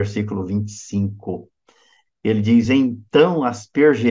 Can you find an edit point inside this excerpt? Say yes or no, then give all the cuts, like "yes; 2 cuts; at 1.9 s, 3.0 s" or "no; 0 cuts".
no; 0 cuts